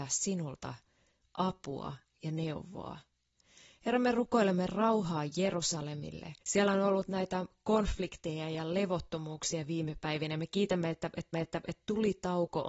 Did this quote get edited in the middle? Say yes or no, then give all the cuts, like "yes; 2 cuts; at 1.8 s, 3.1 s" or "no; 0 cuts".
yes; 2 cuts; at 6.4 s, 11.3 s